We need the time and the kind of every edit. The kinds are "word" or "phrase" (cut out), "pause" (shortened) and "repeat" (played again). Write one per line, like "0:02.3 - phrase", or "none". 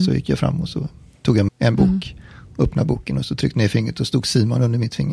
0:01.5 - word